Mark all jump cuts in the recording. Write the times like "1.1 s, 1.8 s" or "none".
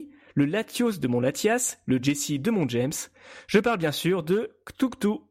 none